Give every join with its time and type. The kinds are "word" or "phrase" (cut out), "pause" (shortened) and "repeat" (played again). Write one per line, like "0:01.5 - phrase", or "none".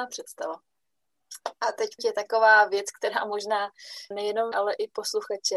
0:02.0 - word
0:04.1 - word
0:04.5 - word